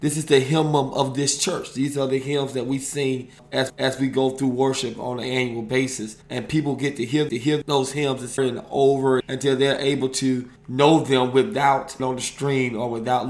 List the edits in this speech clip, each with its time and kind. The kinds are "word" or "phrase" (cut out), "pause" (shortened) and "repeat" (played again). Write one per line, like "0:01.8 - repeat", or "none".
0:03.7 - repeat
0:06.2 - pause
0:07.3 - repeat
0:08.4 - word
0:09.2 - word
0:10.6 - pause
0:12.0 - word

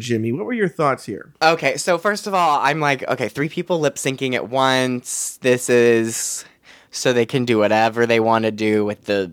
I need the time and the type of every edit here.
none

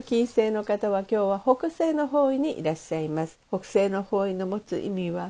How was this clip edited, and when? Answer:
0:03.4 - pause

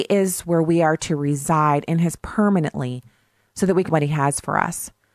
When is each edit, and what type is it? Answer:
0:02.2 - word
0:03.9 - word

